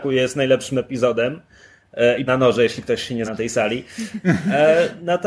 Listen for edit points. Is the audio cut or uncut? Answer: cut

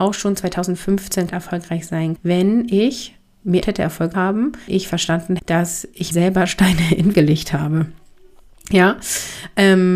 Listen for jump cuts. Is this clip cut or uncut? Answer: cut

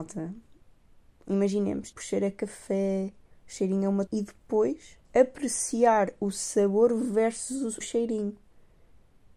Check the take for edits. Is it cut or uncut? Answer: cut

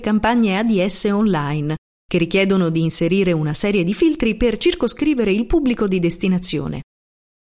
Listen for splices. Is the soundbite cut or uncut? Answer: uncut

